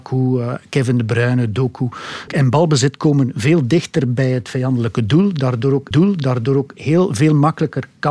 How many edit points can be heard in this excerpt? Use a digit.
2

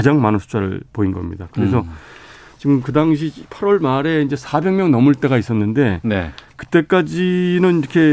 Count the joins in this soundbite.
0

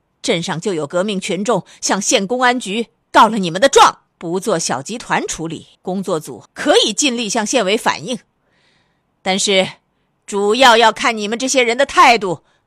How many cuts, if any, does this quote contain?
3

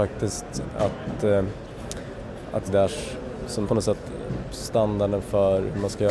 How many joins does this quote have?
2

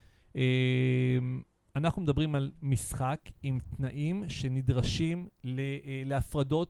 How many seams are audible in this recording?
0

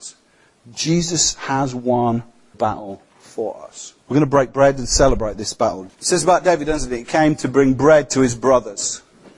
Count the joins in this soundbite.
3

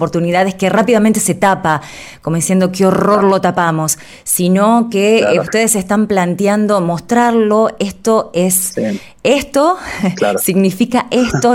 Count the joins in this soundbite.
0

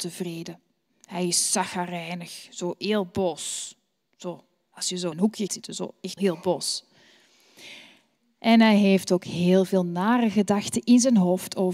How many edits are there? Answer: 3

